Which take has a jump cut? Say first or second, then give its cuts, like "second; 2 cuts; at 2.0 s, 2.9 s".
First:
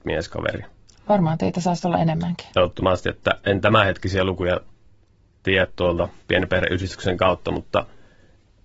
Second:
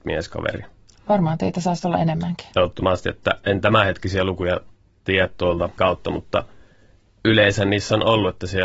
second; 2 cuts; at 4.8 s, 5.8 s